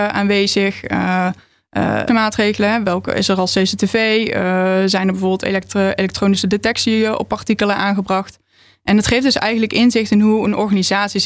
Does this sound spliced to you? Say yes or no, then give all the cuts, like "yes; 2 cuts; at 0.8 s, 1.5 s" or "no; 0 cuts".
yes; 1 cut; at 2.1 s